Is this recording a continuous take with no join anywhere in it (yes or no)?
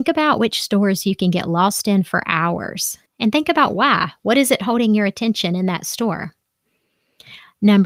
no